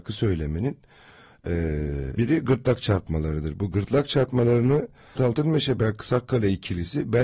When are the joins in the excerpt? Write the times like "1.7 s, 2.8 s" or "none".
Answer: 2.2 s, 5.2 s